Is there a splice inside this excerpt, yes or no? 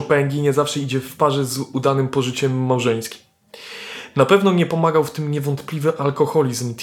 no